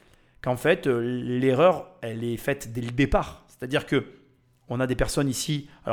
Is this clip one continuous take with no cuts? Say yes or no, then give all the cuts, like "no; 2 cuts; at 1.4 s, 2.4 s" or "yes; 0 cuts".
yes; 0 cuts